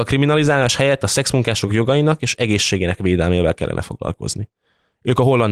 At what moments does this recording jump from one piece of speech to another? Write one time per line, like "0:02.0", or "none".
none